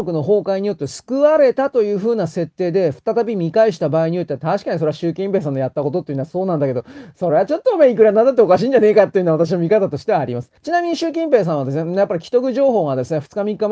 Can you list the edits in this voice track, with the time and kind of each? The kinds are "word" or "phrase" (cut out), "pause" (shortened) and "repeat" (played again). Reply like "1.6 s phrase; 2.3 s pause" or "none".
10.6 s pause

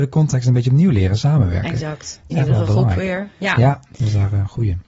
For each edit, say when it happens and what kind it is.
none

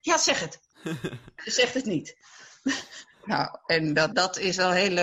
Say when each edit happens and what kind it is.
4.1 s word

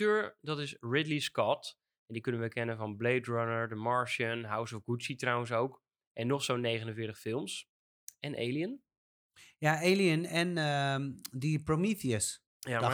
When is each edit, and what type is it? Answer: none

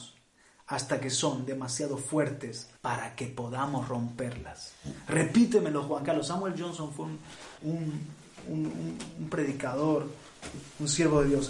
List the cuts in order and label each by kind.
2.8 s pause; 7.6 s pause

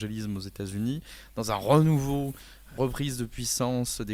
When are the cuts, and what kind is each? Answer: 2.8 s word

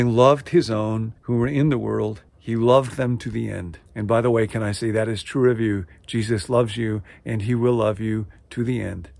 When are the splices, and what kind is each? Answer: 1.2 s pause; 2.3 s pause; 3.9 s pause

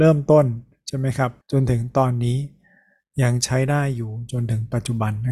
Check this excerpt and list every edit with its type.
1.4 s pause

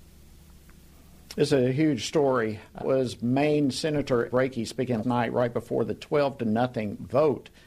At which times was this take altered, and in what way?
2.8 s word; 4.3 s word; 5.0 s word

